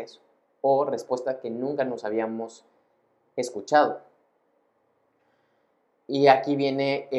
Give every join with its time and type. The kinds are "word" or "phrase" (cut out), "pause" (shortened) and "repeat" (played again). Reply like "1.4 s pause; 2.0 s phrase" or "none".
none